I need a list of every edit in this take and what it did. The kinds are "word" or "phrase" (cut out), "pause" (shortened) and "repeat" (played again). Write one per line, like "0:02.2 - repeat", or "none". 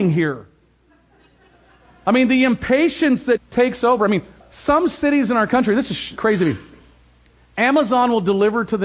0:03.4 - word
0:04.4 - word
0:06.2 - word